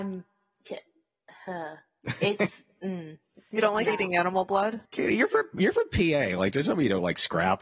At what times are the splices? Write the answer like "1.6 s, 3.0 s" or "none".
4.8 s